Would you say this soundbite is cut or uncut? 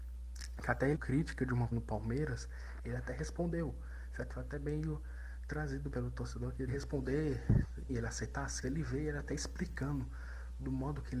cut